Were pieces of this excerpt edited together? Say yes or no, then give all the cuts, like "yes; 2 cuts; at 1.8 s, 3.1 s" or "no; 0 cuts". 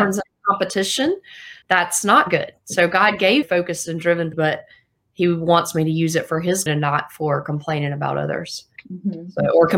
yes; 5 cuts; at 1.6 s, 3.4 s, 4.3 s, 6.7 s, 8.8 s